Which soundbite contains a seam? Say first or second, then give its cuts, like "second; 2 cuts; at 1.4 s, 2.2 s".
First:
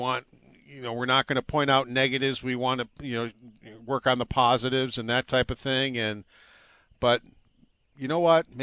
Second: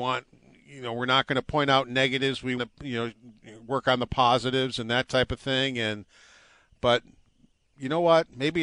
second; 1 cut; at 2.6 s